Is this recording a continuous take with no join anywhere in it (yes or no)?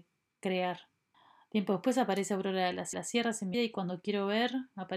no